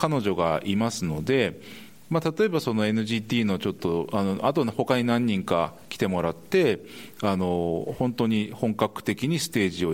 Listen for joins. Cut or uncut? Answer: uncut